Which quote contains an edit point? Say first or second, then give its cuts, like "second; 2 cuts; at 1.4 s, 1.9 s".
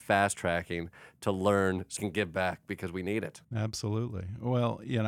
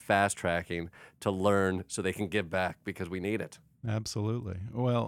first; 2 cuts; at 2.0 s, 3.4 s